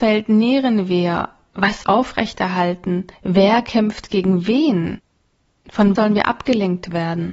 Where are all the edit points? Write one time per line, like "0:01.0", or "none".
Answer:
0:01.8
0:03.1
0:06.0